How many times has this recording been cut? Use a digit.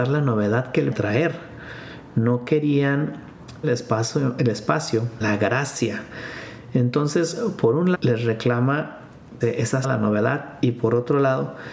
6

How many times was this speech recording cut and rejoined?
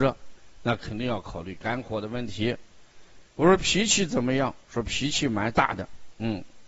1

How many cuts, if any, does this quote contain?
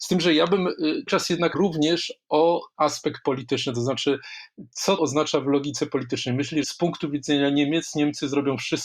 5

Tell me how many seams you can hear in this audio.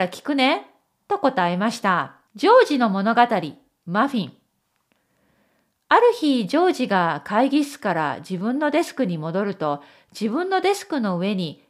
1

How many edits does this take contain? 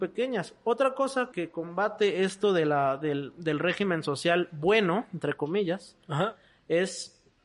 1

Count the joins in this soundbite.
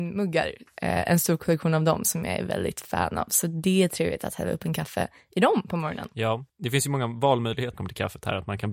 2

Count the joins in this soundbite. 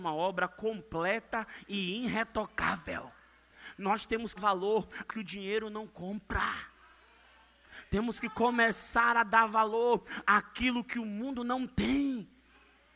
2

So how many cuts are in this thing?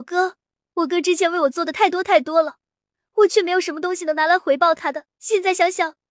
1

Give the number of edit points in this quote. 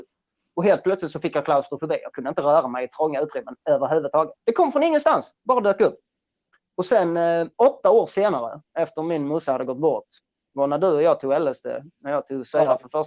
3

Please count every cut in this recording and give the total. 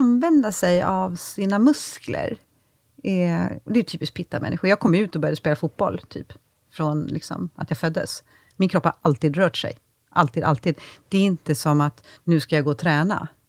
0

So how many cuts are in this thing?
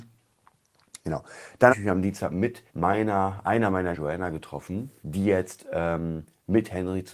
4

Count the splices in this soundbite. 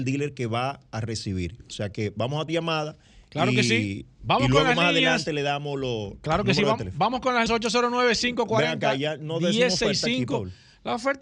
2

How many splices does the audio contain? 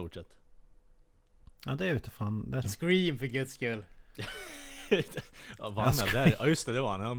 2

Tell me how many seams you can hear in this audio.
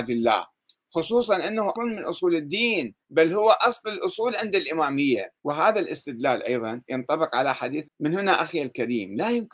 4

